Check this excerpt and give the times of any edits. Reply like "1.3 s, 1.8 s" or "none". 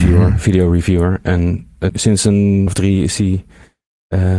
1.9 s, 2.7 s